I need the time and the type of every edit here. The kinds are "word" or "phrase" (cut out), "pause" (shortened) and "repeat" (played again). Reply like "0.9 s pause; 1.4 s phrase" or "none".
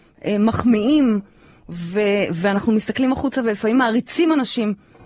none